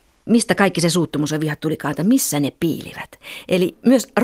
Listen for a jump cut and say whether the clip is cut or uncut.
uncut